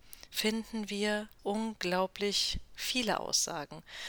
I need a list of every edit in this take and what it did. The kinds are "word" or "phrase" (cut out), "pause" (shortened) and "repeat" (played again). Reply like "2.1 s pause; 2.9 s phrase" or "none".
1.4 s word